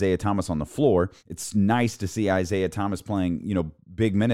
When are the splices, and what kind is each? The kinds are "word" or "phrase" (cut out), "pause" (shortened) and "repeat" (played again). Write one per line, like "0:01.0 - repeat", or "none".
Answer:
0:01.2 - pause